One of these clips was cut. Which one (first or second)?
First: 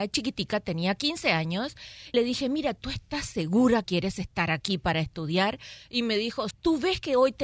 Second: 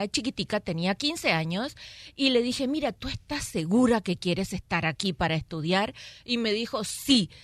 first